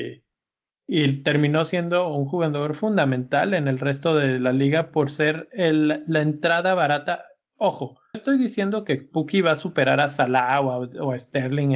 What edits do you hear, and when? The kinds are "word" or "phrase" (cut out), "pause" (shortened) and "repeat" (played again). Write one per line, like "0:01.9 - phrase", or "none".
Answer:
0:08.1 - word